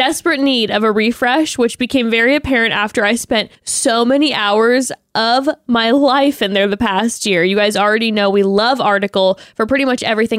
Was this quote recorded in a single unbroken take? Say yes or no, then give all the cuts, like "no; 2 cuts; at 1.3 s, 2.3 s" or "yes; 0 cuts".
no; 1 cut; at 3.5 s